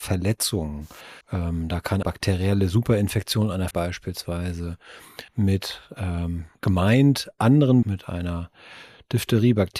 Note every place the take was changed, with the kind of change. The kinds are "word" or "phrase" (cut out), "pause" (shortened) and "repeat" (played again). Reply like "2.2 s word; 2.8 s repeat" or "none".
1.2 s pause; 2.0 s word; 3.7 s word; 5.3 s pause; 6.5 s pause; 7.8 s phrase